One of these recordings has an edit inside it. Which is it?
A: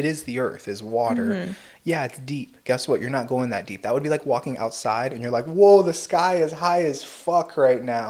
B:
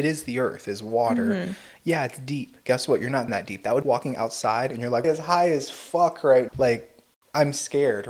B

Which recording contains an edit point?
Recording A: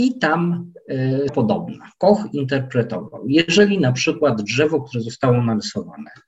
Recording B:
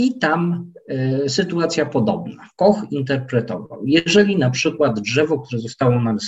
A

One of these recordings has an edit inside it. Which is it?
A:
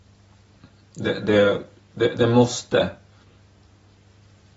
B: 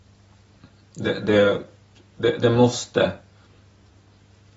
A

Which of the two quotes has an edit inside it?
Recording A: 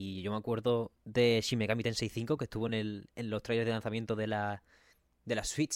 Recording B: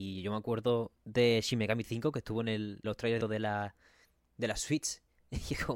B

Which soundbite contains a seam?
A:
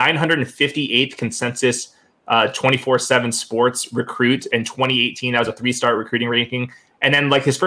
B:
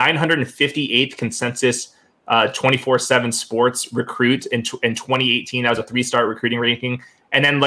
A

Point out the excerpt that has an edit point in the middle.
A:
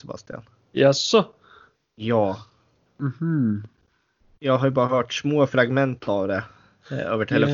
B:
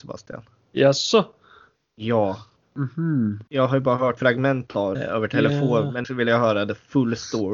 B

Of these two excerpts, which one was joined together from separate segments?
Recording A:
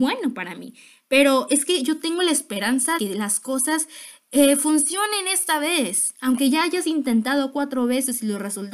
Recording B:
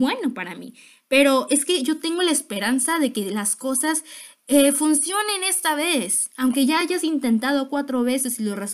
A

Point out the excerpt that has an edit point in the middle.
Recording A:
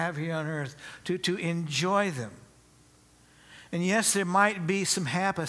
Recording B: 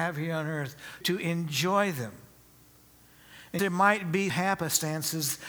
B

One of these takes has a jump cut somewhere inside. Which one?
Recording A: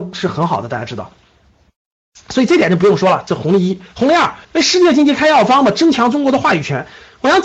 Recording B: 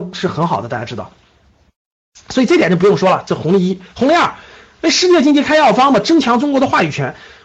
A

